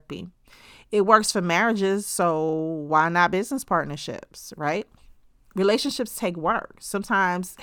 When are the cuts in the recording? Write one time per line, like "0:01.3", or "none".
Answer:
none

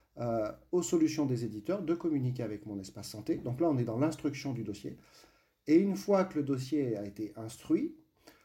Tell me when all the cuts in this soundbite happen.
none

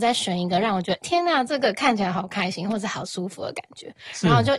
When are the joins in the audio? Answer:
0:01.0

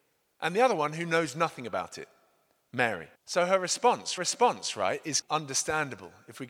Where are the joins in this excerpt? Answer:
0:03.1
0:04.2
0:05.2

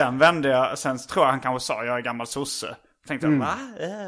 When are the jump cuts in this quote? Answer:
none

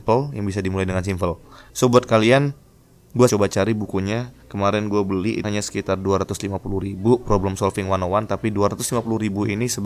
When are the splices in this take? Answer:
0:01.7
0:03.3
0:04.4
0:05.4

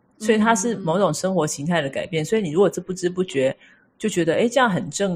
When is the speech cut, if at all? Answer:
none

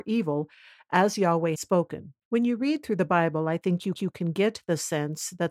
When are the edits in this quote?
0:01.5
0:02.2
0:03.9

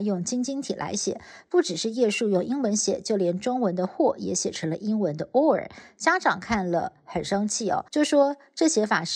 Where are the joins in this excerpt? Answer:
0:07.9

